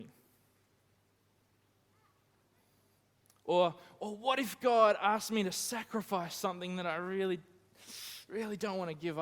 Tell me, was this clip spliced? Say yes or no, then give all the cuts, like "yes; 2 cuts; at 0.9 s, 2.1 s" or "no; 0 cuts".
no; 0 cuts